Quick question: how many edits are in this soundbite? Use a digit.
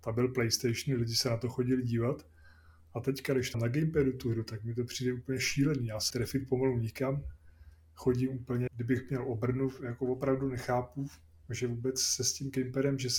3